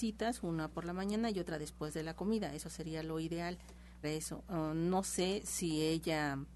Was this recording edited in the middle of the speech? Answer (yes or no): yes